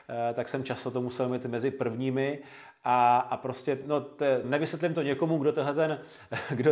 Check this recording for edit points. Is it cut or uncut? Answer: cut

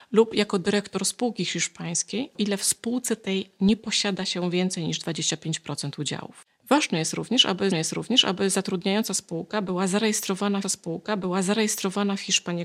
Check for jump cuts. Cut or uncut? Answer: cut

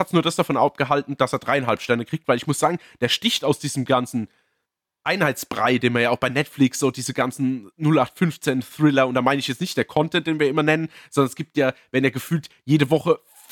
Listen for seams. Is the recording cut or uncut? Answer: uncut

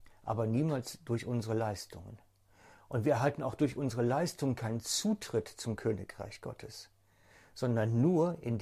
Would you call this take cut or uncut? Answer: uncut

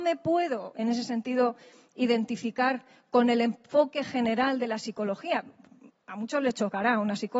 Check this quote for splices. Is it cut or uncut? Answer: uncut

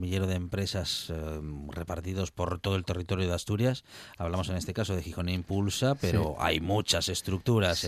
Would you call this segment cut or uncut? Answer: uncut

